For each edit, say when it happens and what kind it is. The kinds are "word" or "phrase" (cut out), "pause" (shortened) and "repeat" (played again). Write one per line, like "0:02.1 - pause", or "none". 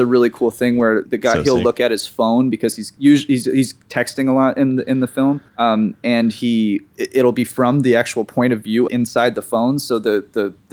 0:01.1 - word
0:05.5 - pause
0:08.9 - word